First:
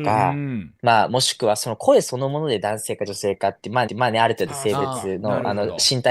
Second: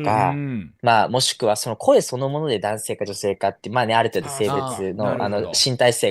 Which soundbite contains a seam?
first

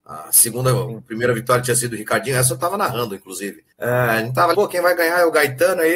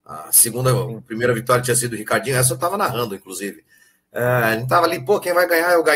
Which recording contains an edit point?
first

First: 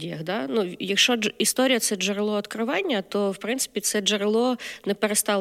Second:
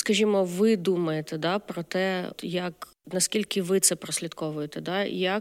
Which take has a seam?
second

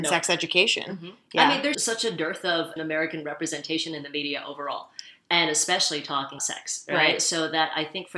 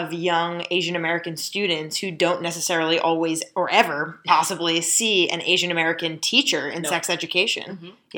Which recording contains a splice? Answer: first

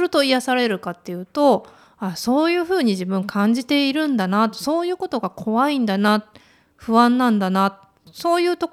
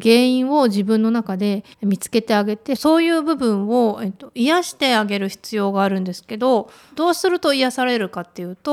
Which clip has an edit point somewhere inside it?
second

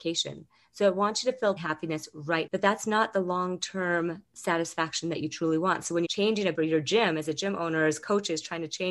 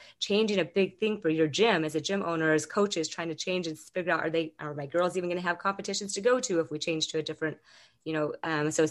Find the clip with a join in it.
first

